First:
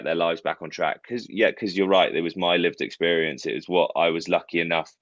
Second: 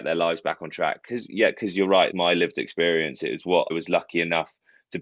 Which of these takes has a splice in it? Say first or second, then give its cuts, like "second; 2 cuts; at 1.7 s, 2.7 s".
second; 2 cuts; at 2.1 s, 3.7 s